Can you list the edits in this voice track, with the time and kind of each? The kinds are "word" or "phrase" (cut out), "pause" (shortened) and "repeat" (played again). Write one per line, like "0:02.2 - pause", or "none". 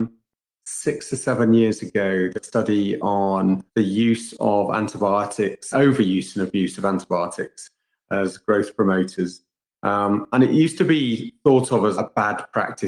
0:02.3 - phrase
0:03.7 - pause
0:05.7 - word
0:11.9 - word